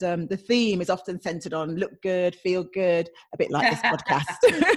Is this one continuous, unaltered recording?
yes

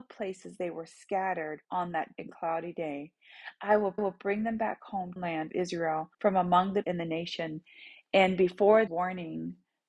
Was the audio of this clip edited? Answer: yes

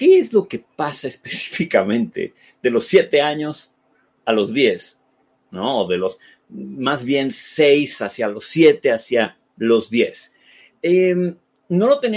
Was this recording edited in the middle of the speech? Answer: no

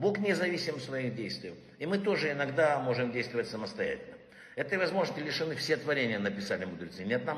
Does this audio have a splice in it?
no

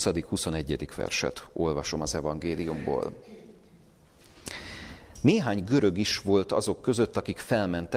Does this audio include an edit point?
no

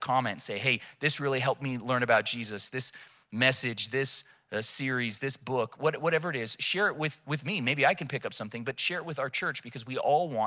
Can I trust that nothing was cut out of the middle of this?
yes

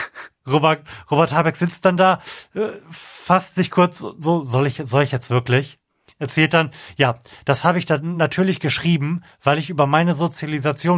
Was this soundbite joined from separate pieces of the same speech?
no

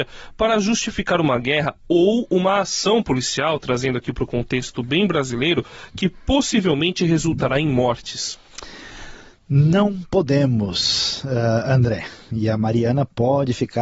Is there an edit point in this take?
no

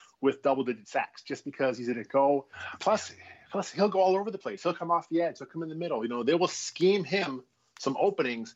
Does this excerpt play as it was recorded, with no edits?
yes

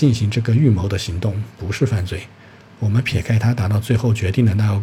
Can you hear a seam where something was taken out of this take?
no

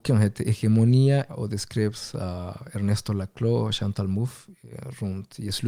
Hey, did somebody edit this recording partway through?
yes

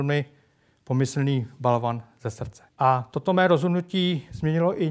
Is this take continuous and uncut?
no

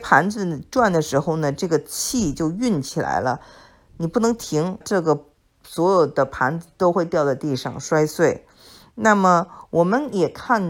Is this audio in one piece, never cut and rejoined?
no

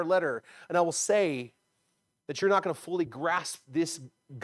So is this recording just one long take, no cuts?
yes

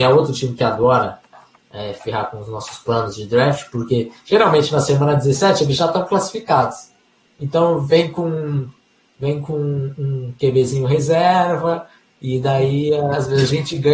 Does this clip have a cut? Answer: no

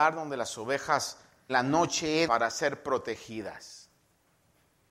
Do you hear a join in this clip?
yes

